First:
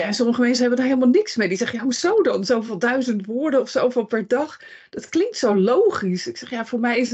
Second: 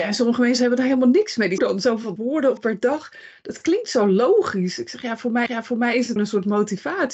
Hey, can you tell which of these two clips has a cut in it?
second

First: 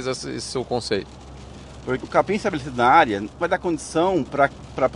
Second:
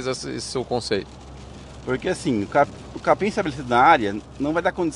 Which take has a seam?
first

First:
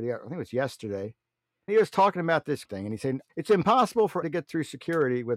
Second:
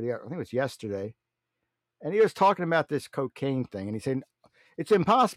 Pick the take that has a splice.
first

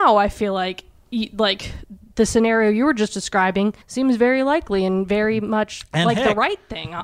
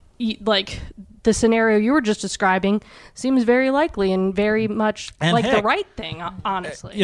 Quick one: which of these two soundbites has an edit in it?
first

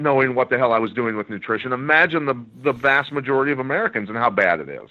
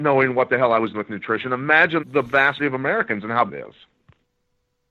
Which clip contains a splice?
second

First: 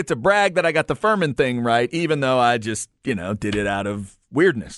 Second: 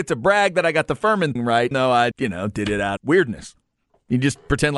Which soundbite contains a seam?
second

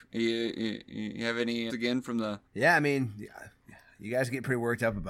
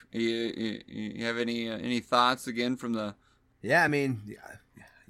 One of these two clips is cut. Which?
first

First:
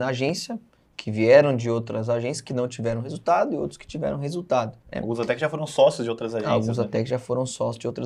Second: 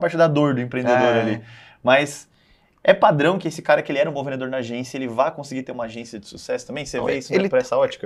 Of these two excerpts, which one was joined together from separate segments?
first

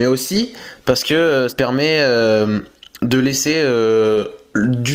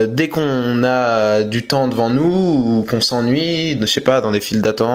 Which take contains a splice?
first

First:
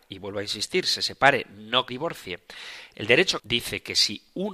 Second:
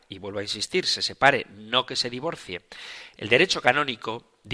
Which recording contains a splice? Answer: first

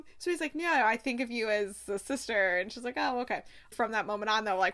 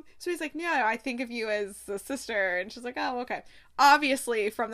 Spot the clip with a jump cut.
first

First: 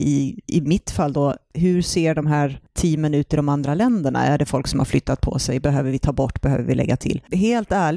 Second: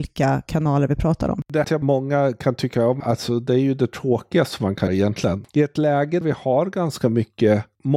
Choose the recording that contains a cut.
second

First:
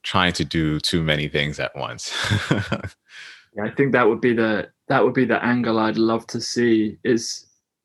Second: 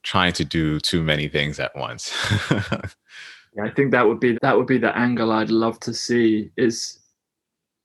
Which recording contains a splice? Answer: second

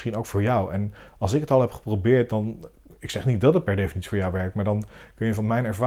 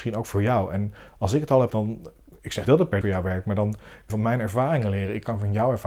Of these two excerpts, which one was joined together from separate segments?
second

